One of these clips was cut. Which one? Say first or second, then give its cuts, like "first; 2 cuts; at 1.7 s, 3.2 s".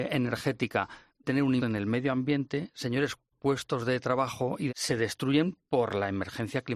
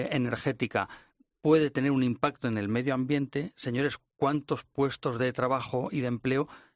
first; 4 cuts; at 1.2 s, 1.6 s, 3.3 s, 4.7 s